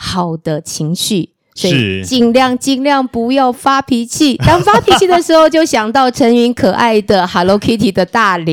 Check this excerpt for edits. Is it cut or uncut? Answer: uncut